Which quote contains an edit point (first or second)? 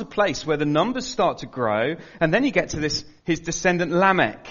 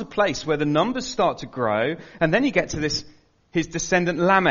first